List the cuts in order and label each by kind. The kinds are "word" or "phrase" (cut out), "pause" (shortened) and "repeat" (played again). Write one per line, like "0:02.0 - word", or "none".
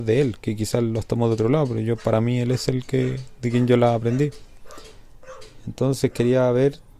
none